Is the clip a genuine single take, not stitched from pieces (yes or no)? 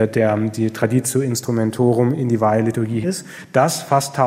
no